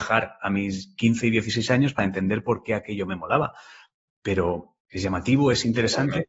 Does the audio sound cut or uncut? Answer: uncut